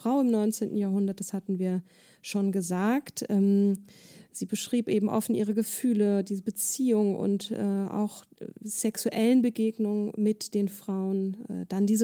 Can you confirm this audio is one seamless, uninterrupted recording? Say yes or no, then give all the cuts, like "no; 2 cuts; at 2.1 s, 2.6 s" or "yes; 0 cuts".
yes; 0 cuts